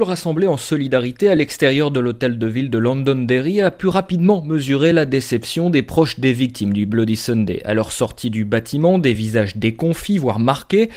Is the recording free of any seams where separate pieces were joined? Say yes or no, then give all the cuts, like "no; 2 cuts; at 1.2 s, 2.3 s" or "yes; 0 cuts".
yes; 0 cuts